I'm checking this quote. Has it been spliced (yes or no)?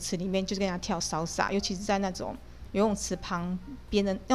no